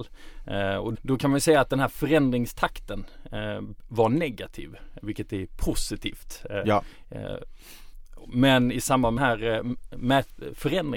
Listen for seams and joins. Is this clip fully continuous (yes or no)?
no